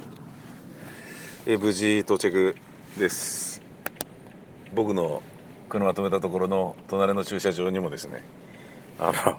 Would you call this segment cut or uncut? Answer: cut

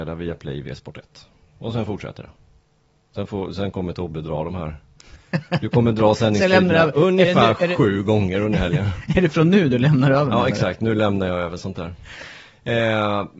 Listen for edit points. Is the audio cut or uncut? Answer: uncut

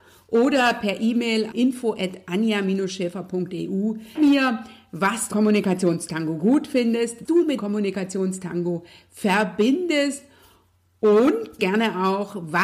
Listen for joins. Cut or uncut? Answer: cut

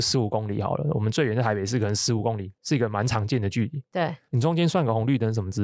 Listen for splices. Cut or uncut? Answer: uncut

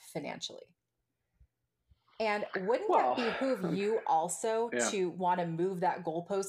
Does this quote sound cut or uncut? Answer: uncut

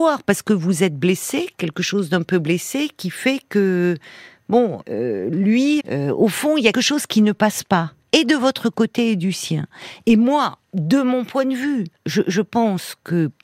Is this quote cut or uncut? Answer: cut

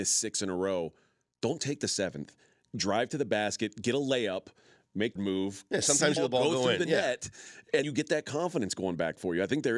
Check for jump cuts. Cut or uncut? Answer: cut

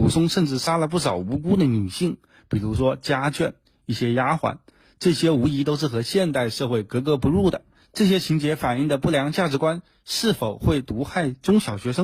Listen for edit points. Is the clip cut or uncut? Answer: uncut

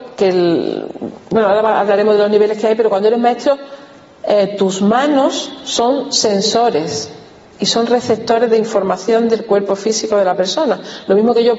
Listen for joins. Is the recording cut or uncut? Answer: uncut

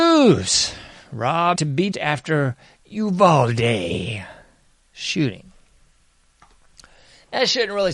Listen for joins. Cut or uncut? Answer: cut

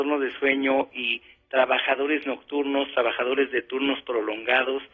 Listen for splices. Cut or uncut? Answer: uncut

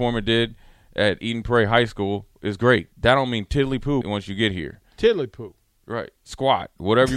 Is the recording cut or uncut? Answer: cut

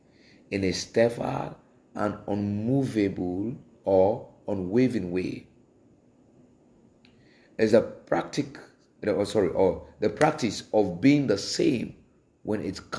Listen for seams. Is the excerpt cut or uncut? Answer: uncut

